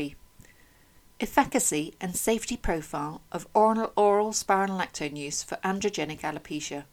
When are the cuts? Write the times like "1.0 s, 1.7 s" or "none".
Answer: none